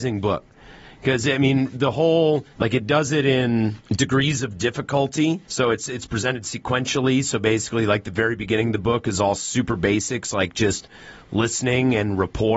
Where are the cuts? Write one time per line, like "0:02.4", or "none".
0:02.5
0:03.8
0:05.4